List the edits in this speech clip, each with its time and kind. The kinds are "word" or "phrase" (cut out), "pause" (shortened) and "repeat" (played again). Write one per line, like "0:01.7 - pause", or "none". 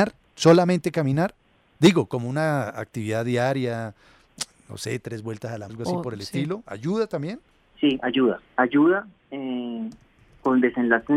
0:05.7 - word
0:07.5 - pause
0:08.5 - pause